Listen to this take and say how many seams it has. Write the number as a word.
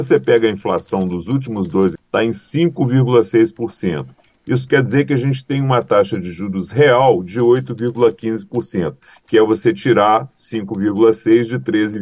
one